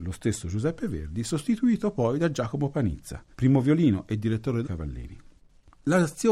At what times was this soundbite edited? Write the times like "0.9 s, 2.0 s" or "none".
3.3 s, 4.6 s

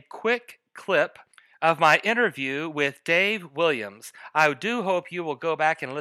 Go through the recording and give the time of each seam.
none

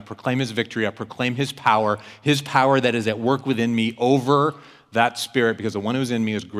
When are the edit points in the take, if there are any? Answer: none

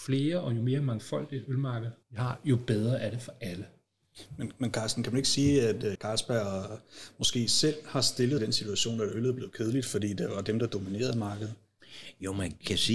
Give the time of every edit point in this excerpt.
2.0 s, 5.9 s, 8.4 s

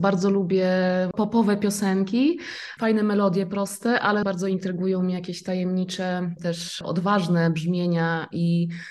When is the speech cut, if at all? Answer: 4.2 s

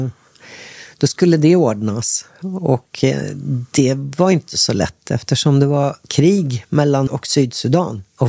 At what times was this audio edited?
6.0 s, 7.1 s

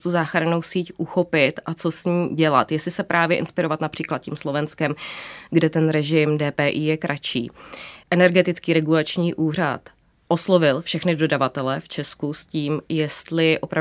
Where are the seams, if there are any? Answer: none

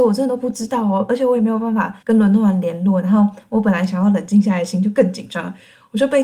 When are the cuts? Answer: 2.0 s

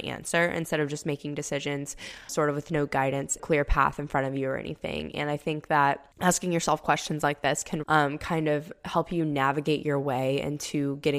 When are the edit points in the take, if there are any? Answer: 2.3 s, 3.4 s, 6.1 s, 7.8 s

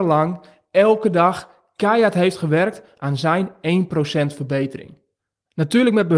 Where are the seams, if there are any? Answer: none

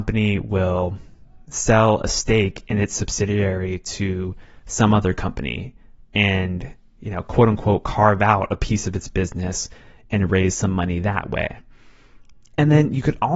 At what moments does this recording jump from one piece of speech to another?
none

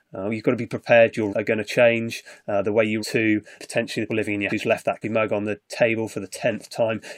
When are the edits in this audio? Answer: 1.3 s, 3.0 s, 3.6 s, 4.1 s, 4.5 s, 5.0 s

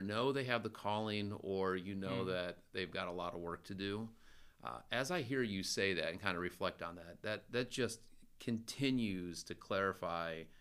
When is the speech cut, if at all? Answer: none

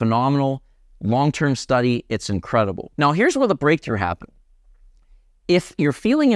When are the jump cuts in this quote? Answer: 2.9 s

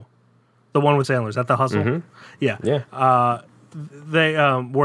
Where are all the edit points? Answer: 1.0 s

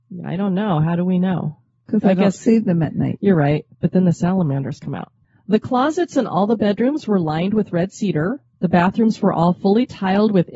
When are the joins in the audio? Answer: none

